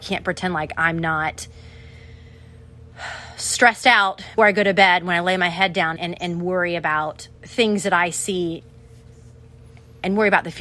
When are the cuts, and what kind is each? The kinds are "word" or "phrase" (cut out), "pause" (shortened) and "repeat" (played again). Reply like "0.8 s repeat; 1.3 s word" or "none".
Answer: 4.4 s word; 6.0 s word; 7.4 s pause